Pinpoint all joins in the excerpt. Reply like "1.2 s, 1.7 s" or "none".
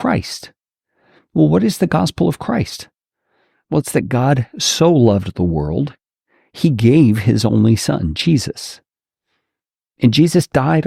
none